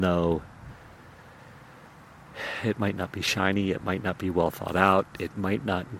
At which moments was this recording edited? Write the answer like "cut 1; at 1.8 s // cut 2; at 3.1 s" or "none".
none

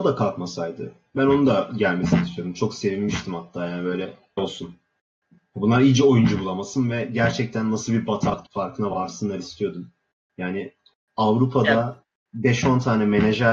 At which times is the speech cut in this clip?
cut 1; at 4.4 s // cut 2; at 8.5 s

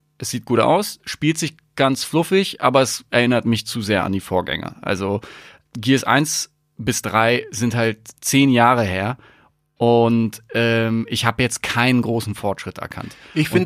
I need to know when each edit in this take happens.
none

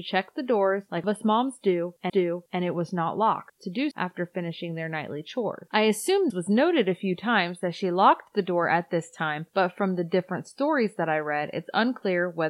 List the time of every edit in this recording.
cut 1; at 1.0 s // cut 2; at 2.1 s // cut 3; at 3.9 s // cut 4; at 6.3 s

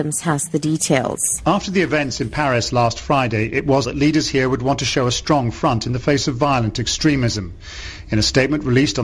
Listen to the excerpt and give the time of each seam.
cut 1; at 3.8 s

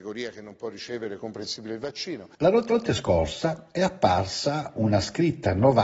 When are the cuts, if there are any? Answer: cut 1; at 1.2 s // cut 2; at 2.3 s // cut 3; at 2.7 s

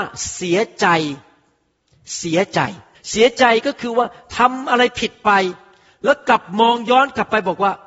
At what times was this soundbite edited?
cut 1; at 2.9 s

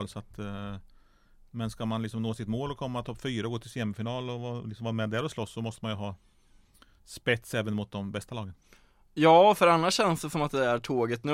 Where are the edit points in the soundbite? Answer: none

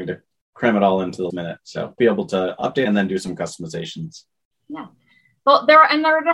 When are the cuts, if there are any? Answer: cut 1; at 1.3 s // cut 2; at 2.0 s // cut 3; at 2.8 s

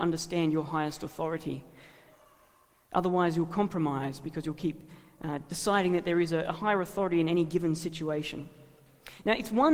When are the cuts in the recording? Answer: none

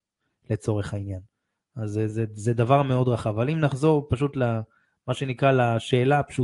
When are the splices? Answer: none

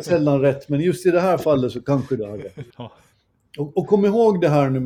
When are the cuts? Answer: cut 1; at 2.7 s

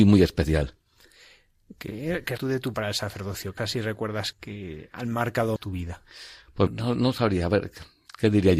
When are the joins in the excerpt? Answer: cut 1; at 2.4 s // cut 2; at 2.7 s // cut 3; at 3.6 s // cut 4; at 4.3 s // cut 5; at 5.6 s // cut 6; at 6.7 s

